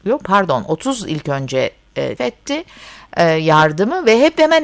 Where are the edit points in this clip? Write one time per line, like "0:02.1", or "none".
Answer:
0:02.2